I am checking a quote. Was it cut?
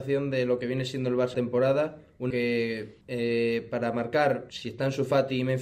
yes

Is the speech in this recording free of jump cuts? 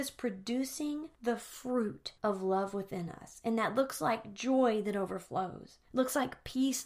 no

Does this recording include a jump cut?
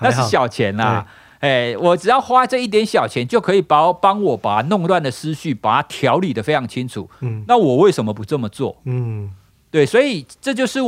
no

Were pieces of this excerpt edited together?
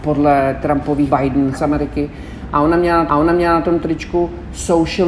yes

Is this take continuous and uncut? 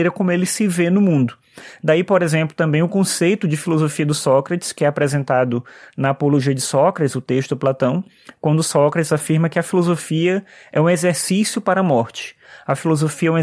yes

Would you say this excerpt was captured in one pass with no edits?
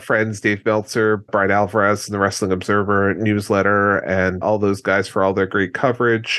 no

